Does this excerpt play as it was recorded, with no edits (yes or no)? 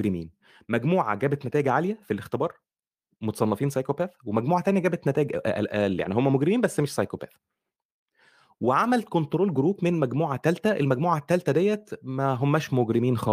yes